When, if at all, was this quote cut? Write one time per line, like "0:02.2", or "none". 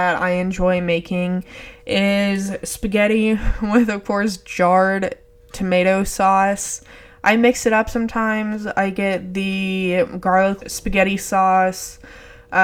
0:10.6

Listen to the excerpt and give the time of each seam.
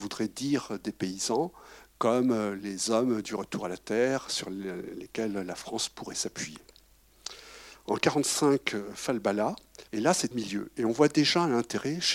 0:09.9
0:10.3

